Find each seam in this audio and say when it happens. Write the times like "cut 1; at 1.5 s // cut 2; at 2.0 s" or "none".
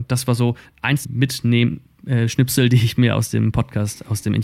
cut 1; at 1.0 s